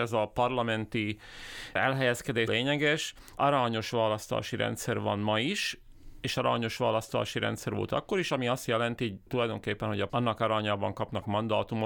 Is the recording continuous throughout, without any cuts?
no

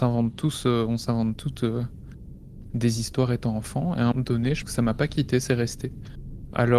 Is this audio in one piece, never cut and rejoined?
no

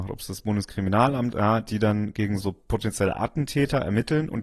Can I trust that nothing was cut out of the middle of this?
no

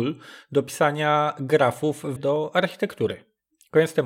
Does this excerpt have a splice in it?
yes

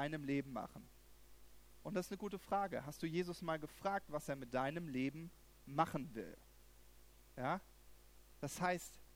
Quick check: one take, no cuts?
yes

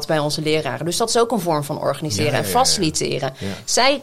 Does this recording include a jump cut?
no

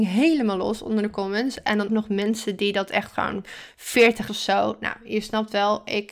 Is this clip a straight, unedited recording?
no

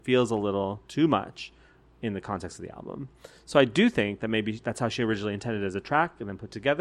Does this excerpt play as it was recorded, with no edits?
yes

